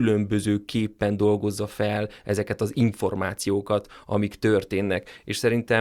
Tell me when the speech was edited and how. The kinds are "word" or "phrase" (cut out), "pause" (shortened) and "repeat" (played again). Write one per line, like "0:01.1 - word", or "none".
none

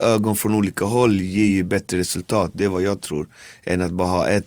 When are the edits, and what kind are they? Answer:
none

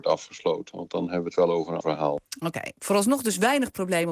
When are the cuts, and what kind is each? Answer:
0:01.8 - word

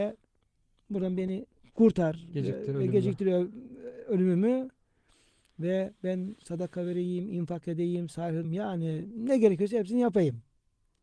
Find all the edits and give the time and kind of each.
0:08.4 - word

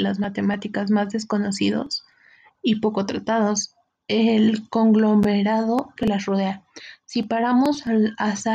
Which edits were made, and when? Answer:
0:06.0 - word

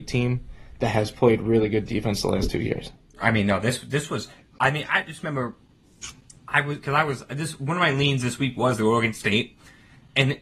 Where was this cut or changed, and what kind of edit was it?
none

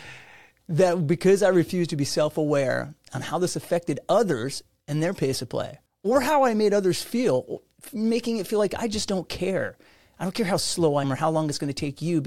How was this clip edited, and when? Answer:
0:05.9 - pause
0:11.0 - word

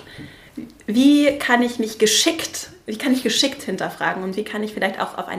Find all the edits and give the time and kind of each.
none

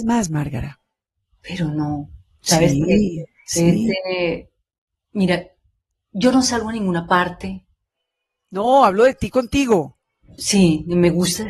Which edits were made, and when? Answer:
none

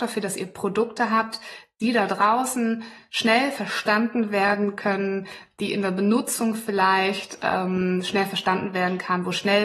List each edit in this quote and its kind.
none

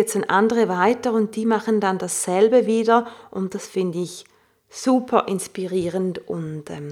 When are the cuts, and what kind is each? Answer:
none

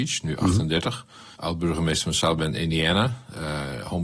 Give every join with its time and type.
0:01.3 - pause

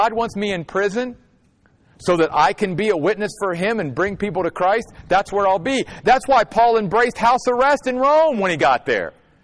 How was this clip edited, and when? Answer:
none

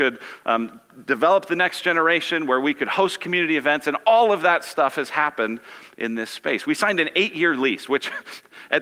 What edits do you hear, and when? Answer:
none

